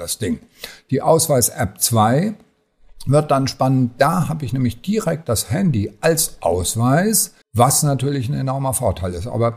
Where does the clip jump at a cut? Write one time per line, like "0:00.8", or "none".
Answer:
0:07.4

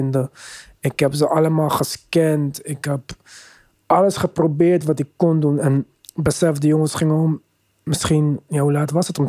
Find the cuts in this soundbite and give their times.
none

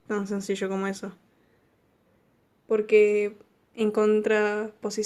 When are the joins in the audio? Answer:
none

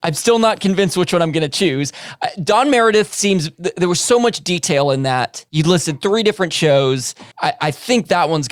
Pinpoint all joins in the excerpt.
0:05.5
0:07.3

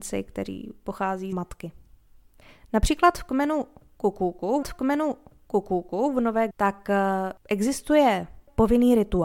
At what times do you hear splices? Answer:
0:01.3
0:04.6
0:06.5

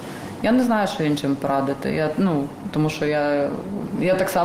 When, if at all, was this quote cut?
none

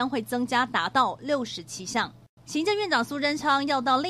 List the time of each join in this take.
0:02.4

